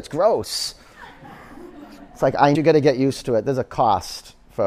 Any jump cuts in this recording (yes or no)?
yes